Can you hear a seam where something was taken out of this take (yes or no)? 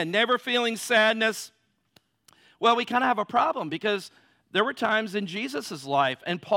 no